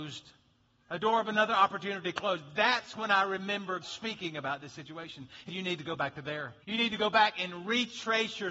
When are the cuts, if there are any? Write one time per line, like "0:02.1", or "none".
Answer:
0:03.8
0:05.5
0:06.6